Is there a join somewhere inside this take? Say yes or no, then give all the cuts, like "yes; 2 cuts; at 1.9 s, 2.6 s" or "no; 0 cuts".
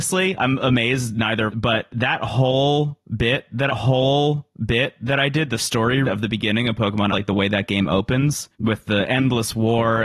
yes; 4 cuts; at 1.5 s, 3.7 s, 6.0 s, 7.1 s